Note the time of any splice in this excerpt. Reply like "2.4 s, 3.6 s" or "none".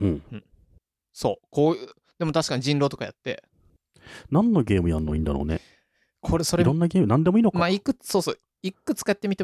none